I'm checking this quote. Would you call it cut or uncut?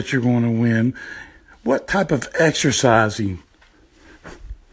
uncut